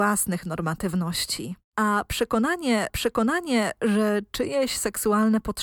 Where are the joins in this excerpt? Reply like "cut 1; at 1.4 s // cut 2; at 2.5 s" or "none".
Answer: cut 1; at 1.6 s // cut 2; at 2.9 s